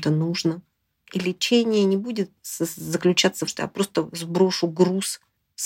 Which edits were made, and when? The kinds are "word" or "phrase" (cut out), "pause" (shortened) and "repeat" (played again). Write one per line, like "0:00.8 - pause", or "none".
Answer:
0:02.4 - pause
0:03.5 - phrase